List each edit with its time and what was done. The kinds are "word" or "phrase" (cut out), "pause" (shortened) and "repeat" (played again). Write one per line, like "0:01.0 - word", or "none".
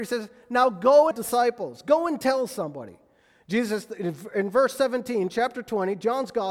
0:01.1 - phrase